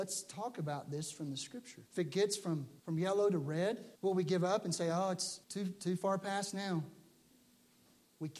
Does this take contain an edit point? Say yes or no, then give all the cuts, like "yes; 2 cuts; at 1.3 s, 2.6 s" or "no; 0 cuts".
yes; 4 cuts; at 1.9 s, 2.8 s, 3.9 s, 5.4 s